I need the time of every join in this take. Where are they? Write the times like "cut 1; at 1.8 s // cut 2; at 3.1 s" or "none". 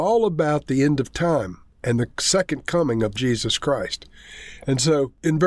cut 1; at 3.2 s